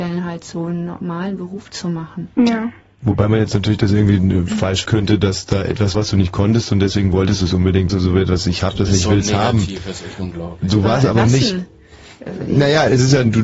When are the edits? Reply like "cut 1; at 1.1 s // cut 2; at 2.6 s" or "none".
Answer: cut 1; at 4.9 s // cut 2; at 5.9 s // cut 3; at 7.9 s